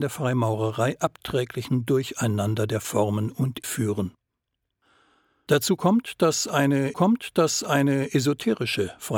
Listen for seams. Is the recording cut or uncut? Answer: cut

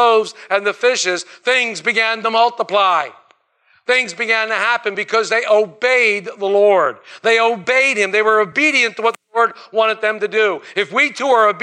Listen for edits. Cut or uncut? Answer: uncut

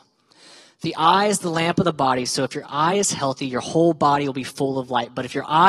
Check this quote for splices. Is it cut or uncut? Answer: uncut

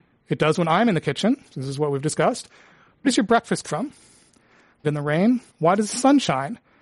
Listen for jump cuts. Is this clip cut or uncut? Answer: cut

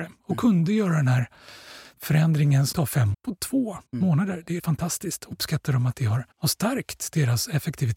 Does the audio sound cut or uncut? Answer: cut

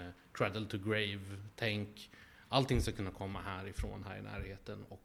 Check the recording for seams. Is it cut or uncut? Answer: uncut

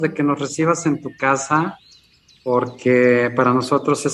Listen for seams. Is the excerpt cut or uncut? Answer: uncut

